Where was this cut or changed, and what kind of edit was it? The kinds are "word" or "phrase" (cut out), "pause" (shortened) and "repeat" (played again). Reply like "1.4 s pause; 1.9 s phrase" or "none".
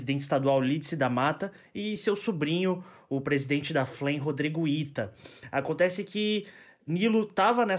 none